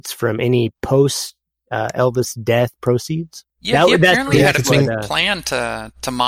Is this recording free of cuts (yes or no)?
yes